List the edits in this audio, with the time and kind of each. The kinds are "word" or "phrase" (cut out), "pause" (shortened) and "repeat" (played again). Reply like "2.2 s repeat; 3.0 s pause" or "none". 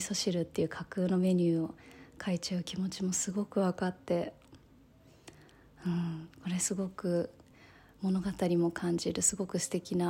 none